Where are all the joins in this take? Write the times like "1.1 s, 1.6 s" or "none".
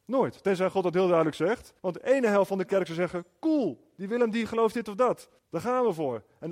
1.8 s, 5.4 s